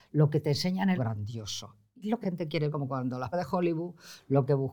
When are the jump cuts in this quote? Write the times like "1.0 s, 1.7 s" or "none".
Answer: 1.0 s, 2.2 s, 2.7 s, 3.3 s